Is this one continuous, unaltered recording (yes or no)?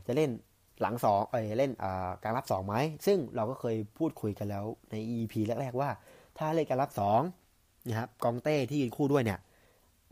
yes